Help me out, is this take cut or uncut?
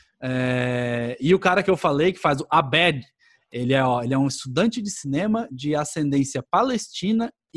uncut